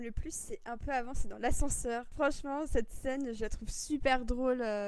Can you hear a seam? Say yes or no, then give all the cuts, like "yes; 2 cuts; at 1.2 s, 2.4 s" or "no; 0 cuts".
no; 0 cuts